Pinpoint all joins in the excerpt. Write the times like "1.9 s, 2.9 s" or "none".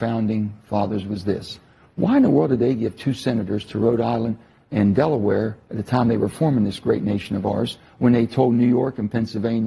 none